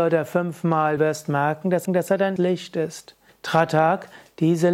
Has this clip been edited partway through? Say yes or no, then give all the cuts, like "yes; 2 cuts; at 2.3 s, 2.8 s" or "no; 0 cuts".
yes; 4 cuts; at 1.0 s, 1.9 s, 2.4 s, 3.3 s